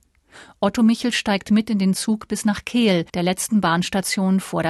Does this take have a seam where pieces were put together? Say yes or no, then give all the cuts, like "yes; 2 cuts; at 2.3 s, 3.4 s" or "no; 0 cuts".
yes; 1 cut; at 3.1 s